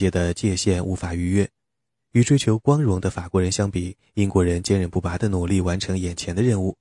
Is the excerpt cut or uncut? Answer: cut